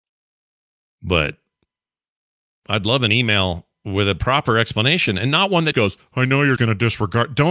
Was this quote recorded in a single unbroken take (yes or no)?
no